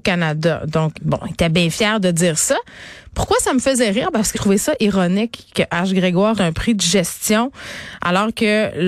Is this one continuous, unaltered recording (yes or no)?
no